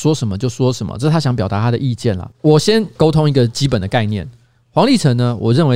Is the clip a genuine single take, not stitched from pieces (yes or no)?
yes